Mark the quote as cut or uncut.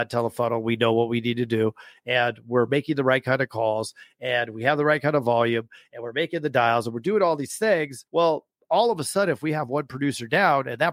cut